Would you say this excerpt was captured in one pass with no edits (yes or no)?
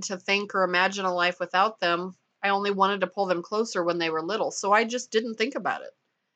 yes